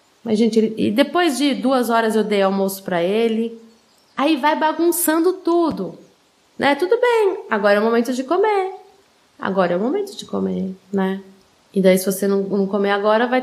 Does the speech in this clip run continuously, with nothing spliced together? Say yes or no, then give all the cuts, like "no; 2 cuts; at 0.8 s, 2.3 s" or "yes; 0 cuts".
yes; 0 cuts